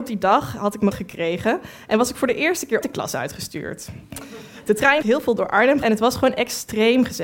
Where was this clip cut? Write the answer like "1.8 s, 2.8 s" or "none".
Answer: 0.9 s, 2.8 s, 5.0 s, 5.8 s